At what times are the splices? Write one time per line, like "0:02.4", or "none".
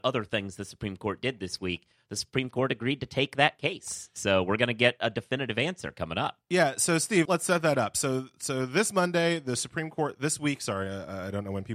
0:07.3

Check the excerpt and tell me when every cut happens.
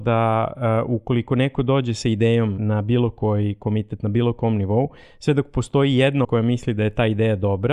0:02.6
0:06.2

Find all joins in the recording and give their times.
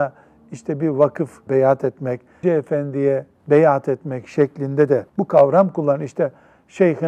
0:01.5
0:02.4
0:05.1

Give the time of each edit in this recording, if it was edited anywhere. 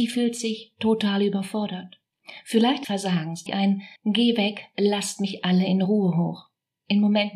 0:02.8
0:03.5
0:04.0

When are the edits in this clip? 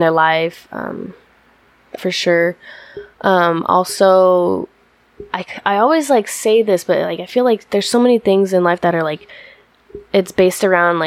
0:02.0

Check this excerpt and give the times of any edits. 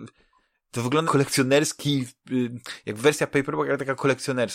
0:01.0

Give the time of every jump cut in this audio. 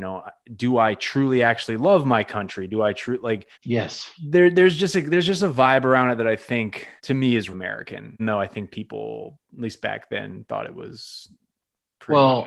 0:03.5
0:07.0
0:07.5
0:08.2

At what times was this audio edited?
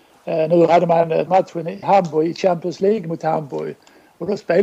0:01.3
0:01.8

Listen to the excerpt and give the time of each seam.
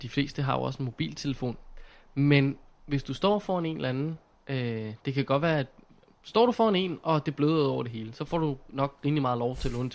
none

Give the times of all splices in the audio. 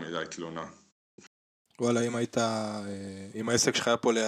none

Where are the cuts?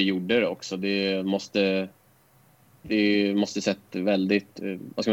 none

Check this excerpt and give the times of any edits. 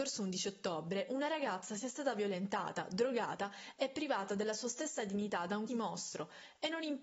0:05.7

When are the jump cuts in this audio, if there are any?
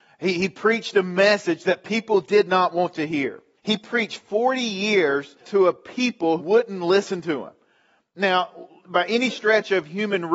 0:03.6
0:05.4
0:06.4

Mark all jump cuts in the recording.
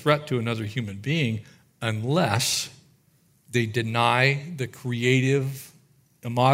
none

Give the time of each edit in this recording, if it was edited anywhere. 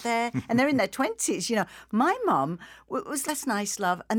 0:03.2

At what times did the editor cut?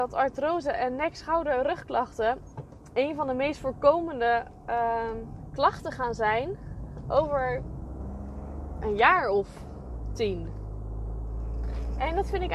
none

